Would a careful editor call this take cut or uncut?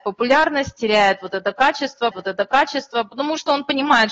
cut